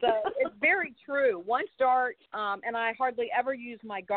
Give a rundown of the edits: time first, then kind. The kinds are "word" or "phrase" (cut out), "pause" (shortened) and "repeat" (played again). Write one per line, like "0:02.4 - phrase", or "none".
0:01.7 - word
0:02.3 - pause